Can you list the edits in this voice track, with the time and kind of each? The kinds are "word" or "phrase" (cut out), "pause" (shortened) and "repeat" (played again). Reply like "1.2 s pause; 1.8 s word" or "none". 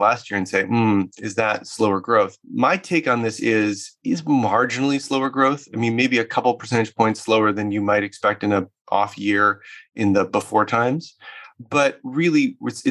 2.4 s pause; 4.0 s pause